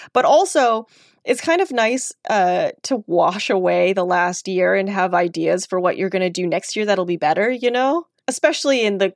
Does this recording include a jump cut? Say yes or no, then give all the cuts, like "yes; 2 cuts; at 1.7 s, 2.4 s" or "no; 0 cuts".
no; 0 cuts